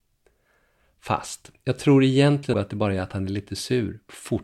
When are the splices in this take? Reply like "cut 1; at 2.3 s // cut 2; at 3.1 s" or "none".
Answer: cut 1; at 2.5 s